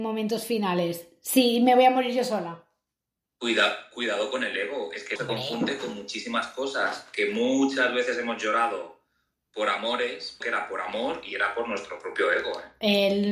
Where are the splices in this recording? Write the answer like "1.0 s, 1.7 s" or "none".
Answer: 5.2 s, 10.4 s